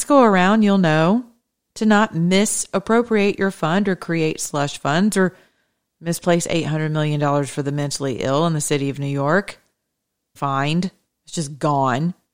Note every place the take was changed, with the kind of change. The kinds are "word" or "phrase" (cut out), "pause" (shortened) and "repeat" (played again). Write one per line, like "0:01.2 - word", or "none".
0:10.4 - phrase